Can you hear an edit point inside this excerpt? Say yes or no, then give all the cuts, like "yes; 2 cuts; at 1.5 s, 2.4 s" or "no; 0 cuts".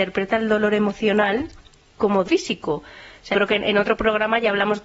yes; 2 cuts; at 2.2 s, 3.3 s